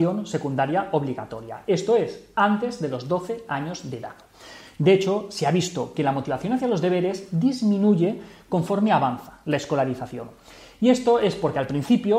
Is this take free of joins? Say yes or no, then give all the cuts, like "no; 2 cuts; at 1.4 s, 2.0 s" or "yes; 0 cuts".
yes; 0 cuts